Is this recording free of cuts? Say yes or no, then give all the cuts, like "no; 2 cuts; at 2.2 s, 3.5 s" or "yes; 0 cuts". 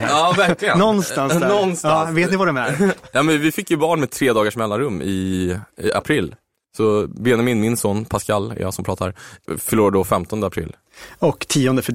yes; 0 cuts